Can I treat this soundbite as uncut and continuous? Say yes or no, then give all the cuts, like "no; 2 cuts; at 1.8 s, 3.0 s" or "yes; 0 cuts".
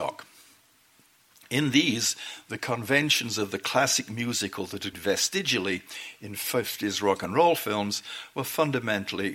no; 1 cut; at 4.9 s